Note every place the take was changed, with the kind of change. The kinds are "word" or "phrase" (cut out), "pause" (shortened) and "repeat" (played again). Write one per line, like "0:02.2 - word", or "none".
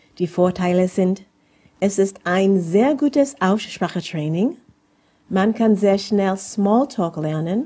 none